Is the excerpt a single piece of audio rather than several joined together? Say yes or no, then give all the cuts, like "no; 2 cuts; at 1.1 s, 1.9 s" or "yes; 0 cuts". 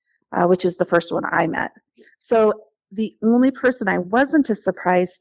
yes; 0 cuts